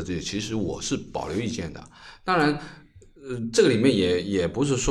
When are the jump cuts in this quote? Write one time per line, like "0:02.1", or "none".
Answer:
none